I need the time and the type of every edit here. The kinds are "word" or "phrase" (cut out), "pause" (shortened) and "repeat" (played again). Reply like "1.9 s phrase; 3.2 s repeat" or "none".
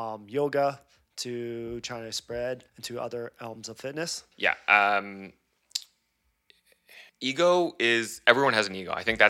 2.7 s pause; 4.3 s pause; 7.1 s pause